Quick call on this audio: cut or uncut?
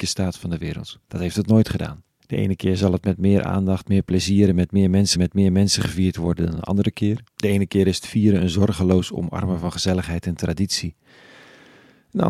cut